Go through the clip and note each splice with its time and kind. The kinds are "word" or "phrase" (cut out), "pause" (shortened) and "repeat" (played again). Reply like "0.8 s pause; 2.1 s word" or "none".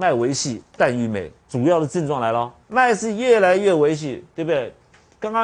1.4 s pause; 2.6 s pause; 4.3 s pause